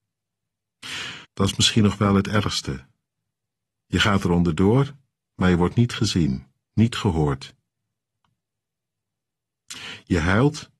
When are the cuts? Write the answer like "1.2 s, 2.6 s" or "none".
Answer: 1.2 s